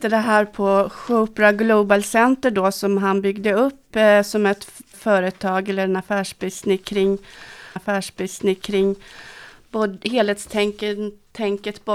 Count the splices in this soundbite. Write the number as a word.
two